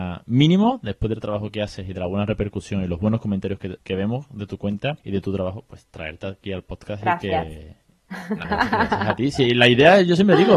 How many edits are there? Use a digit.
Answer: 3